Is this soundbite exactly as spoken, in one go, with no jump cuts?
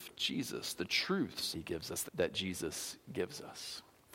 no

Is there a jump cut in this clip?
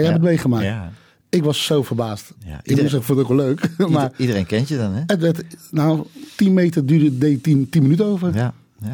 no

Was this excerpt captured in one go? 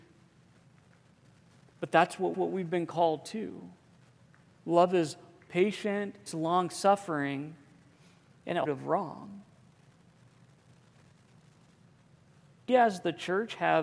no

